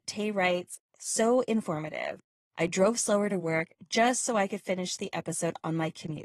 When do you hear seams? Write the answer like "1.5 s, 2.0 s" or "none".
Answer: none